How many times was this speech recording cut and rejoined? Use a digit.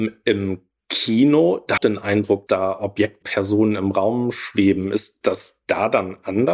4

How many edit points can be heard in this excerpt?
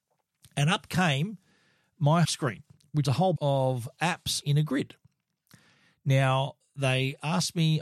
4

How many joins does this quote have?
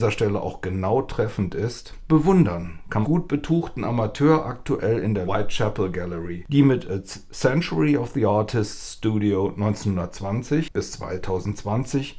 2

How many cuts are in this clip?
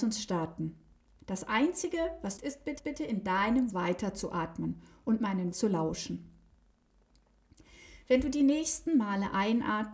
4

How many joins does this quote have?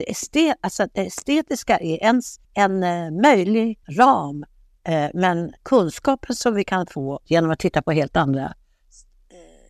4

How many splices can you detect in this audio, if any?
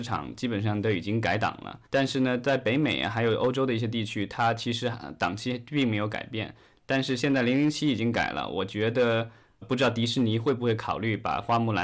2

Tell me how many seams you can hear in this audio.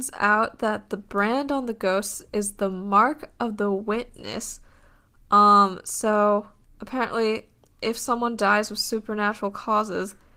0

